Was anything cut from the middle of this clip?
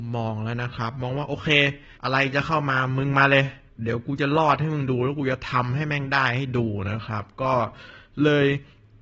yes; 2 cuts; at 2.0 s, 3.7 s

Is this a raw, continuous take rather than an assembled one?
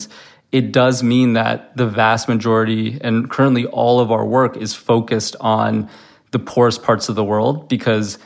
yes; 0 cuts

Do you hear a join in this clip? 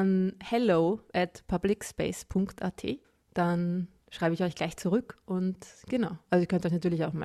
no; 0 cuts

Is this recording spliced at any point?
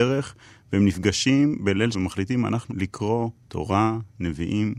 yes; 2 cuts; at 1.9 s, 2.7 s

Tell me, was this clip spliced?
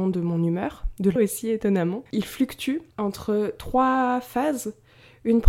yes; 3 cuts; at 1.2 s, 2.1 s, 2.9 s

